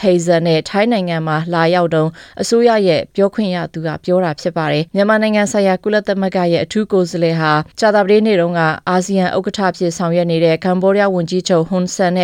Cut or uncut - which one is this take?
cut